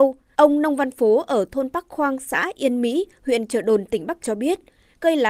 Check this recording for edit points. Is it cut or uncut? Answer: cut